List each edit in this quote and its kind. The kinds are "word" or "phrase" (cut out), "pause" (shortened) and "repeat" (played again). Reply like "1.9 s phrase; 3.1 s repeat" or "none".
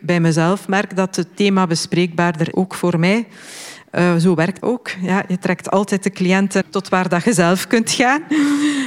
2.5 s word; 4.6 s word; 6.6 s word